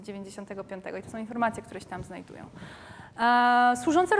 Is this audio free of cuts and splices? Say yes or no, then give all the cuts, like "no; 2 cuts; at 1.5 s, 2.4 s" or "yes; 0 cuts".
yes; 0 cuts